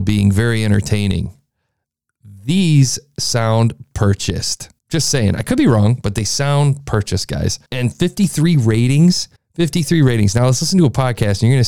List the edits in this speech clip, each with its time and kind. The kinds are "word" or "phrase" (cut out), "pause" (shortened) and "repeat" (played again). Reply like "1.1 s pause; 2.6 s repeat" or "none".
4.8 s pause; 7.7 s pause; 9.4 s pause